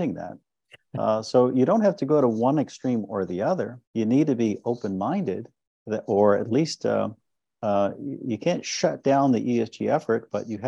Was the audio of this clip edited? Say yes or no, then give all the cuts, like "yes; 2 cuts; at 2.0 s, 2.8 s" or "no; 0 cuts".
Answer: yes; 1 cut; at 3.9 s